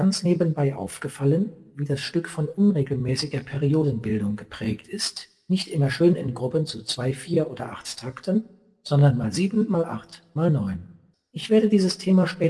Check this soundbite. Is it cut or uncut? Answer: uncut